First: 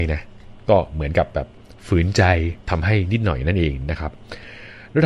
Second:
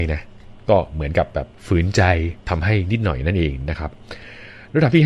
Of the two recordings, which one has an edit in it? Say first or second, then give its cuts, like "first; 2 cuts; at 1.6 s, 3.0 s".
second; 1 cut; at 1.6 s